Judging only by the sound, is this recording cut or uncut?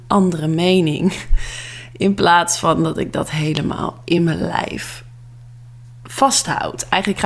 uncut